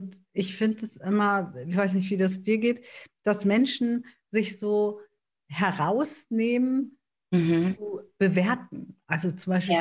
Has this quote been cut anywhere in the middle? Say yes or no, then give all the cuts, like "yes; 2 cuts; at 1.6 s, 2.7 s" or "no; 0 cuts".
no; 0 cuts